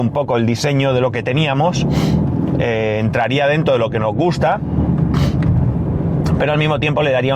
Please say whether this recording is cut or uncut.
uncut